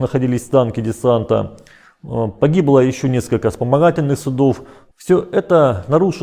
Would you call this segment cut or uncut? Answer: uncut